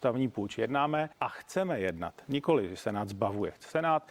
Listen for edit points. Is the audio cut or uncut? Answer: cut